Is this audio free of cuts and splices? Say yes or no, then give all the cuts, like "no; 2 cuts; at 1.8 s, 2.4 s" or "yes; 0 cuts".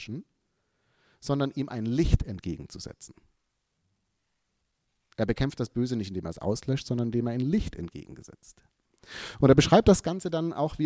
yes; 0 cuts